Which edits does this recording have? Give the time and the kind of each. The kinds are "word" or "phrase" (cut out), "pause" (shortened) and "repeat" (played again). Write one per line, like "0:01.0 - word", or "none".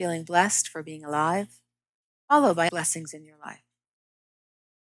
0:02.7 - word